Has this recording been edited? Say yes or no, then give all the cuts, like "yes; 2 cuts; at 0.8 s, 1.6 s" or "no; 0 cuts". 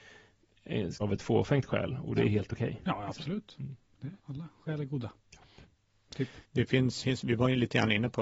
yes; 4 cuts; at 1.0 s, 4.2 s, 6.4 s, 7.0 s